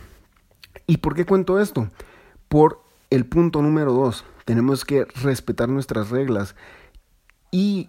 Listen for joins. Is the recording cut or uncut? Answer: uncut